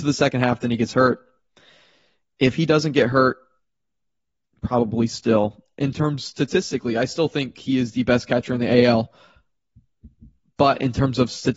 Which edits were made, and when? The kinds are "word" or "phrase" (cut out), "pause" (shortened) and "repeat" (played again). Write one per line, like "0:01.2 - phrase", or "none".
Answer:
none